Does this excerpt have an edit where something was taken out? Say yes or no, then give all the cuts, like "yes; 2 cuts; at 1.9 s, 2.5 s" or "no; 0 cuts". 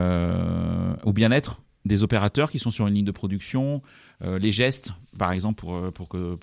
no; 0 cuts